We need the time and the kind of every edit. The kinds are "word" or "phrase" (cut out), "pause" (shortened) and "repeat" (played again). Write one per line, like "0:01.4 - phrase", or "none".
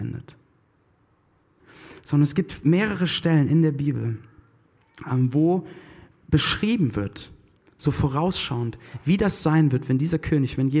none